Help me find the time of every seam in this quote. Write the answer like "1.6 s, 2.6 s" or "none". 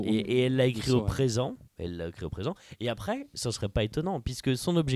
1.7 s